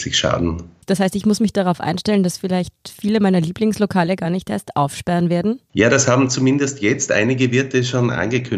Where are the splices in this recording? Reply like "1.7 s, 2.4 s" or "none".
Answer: none